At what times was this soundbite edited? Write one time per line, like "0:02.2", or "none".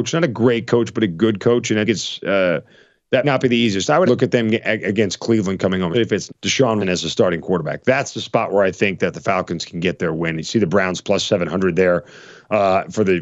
0:01.9
0:03.2
0:04.1
0:05.9
0:06.3
0:06.8